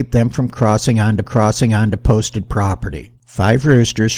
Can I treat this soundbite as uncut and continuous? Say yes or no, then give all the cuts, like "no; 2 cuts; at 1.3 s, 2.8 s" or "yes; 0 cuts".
no; 2 cuts; at 1.2 s, 3.2 s